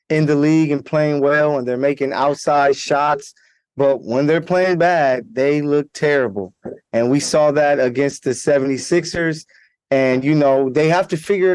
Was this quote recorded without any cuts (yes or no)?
yes